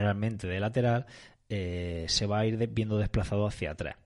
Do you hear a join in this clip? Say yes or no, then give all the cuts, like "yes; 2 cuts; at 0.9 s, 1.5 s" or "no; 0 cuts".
no; 0 cuts